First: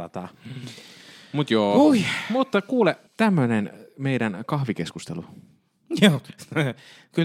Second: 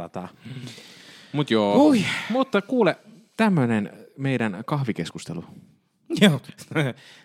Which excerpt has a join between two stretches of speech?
first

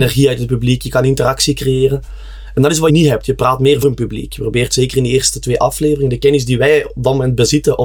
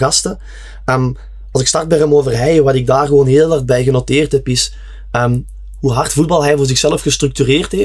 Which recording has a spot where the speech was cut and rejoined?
first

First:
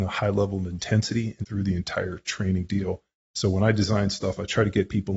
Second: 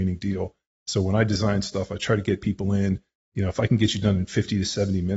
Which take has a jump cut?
first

